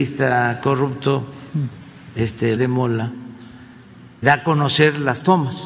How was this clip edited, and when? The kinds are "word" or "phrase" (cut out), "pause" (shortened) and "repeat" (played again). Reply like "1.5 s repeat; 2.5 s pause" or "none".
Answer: 2.6 s word; 4.2 s word